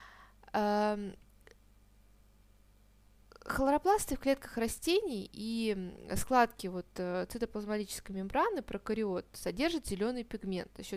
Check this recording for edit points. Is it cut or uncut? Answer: uncut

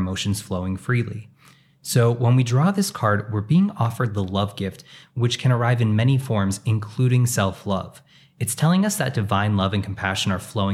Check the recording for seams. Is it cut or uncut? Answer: uncut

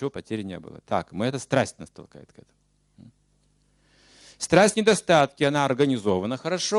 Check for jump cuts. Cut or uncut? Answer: cut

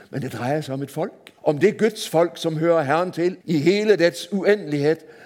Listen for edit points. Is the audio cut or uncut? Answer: cut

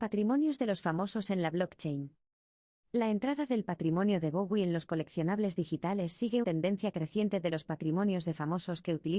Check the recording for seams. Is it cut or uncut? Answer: cut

